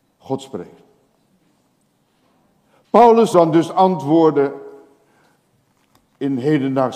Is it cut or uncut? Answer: cut